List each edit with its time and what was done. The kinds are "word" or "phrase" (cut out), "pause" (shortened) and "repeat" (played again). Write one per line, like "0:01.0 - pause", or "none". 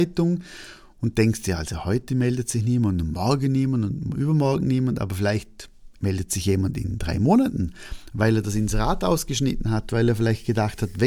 0:06.0 - pause